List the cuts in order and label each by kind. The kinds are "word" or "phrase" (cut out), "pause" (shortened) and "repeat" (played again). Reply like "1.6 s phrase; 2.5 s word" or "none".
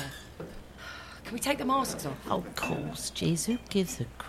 none